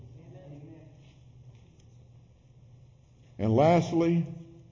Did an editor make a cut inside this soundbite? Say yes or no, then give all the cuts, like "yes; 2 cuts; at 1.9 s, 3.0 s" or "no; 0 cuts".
no; 0 cuts